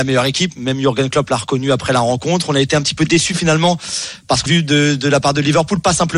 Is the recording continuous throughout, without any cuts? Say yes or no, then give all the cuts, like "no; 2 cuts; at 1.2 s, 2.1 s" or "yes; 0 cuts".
no; 1 cut; at 4.5 s